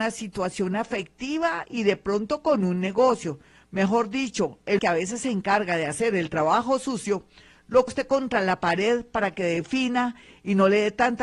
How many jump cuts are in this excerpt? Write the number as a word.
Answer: two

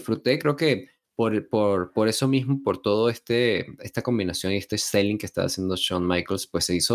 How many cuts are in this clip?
zero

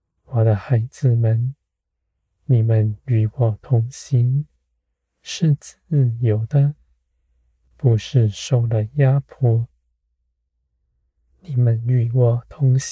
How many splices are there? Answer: zero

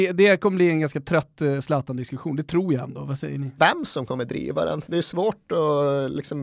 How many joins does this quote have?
one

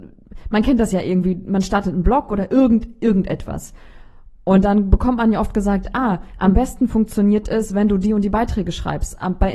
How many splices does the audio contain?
zero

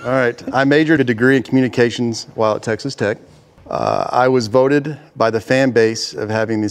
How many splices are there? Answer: one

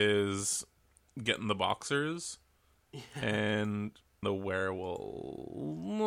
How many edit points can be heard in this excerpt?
two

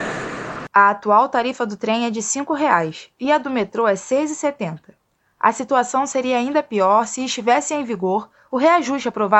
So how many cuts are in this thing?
zero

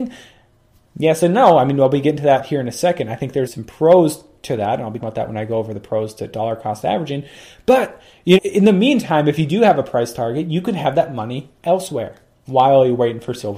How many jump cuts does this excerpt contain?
three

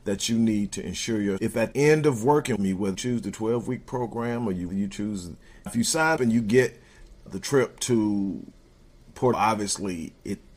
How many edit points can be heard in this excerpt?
nine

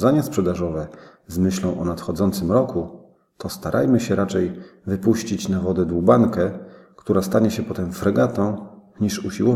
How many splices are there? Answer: zero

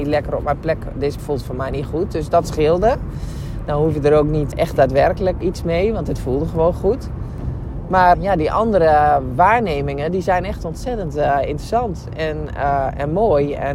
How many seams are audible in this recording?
four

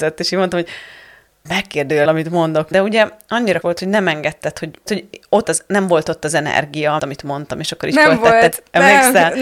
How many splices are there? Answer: seven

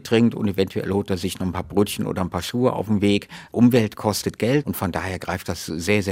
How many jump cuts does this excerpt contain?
zero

